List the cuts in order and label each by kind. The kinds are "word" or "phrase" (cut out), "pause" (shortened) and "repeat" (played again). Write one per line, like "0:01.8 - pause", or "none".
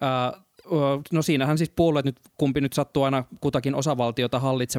none